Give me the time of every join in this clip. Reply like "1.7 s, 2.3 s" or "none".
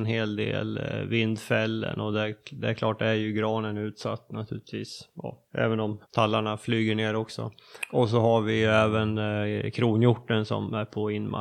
5.5 s, 6.0 s